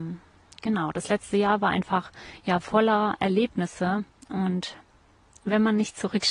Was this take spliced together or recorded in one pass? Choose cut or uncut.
uncut